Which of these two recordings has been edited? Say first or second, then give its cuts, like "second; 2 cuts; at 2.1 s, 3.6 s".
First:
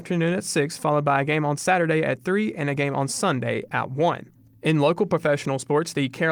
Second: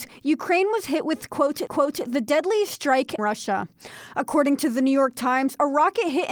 second; 2 cuts; at 1.7 s, 3.2 s